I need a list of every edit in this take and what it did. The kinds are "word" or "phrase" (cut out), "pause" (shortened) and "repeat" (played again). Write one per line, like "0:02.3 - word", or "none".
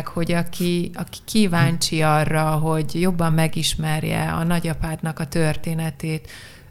none